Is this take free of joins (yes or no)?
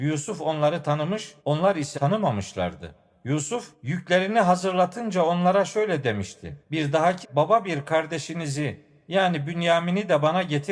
no